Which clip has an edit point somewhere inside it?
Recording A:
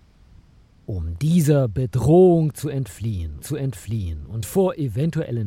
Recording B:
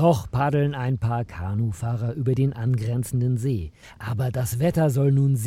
A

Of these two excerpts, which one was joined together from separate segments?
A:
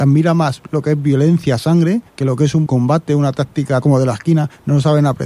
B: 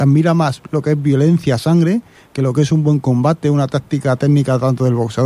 A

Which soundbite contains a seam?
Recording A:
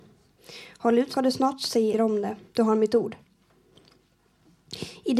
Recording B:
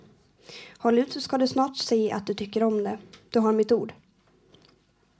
A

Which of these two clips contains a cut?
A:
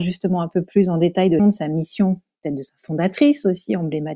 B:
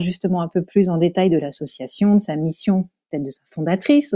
A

